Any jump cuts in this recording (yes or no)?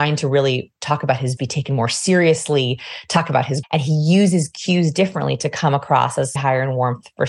yes